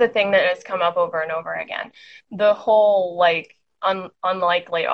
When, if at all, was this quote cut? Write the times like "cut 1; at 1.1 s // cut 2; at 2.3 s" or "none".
none